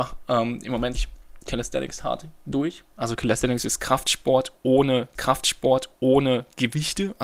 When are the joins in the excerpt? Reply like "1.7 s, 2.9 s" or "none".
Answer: 0.9 s, 5.1 s